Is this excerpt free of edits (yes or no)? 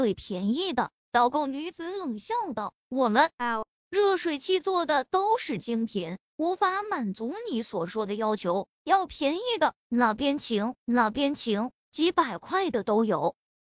no